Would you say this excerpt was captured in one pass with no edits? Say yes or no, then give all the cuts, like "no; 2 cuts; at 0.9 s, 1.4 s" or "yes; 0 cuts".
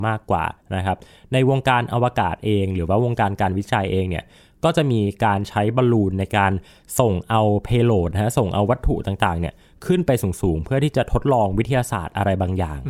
yes; 0 cuts